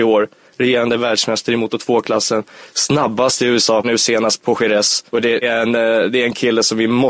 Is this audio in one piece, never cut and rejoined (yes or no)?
no